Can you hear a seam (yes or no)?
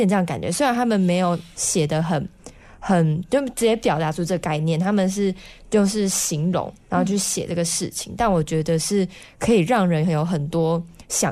no